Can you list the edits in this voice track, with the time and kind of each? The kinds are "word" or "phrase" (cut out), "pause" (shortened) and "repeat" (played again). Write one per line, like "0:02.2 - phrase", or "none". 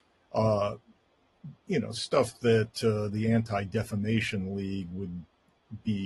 0:01.6 - pause